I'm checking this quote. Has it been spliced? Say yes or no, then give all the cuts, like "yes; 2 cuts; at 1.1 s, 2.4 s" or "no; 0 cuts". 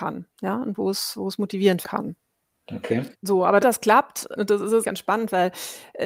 yes; 5 cuts; at 1.8 s, 3.1 s, 3.6 s, 4.4 s, 4.8 s